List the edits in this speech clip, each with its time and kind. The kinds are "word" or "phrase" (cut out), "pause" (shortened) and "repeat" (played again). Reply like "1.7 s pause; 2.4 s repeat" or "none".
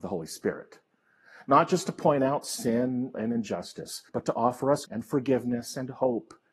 3.1 s word; 4.1 s pause; 4.8 s word